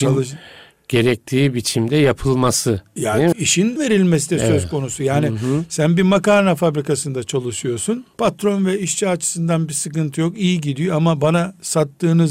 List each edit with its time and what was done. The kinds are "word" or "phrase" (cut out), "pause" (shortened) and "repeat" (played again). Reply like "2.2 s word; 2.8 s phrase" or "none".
3.3 s word; 3.8 s word; 8.1 s pause